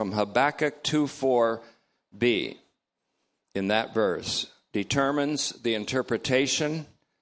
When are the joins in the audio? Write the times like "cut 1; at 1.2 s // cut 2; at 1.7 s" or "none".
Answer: none